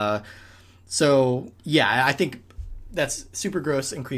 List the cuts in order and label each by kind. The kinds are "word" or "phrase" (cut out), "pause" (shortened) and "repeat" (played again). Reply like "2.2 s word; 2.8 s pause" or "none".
1.6 s pause